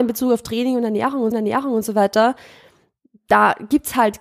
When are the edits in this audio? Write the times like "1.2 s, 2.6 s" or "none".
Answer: 1.3 s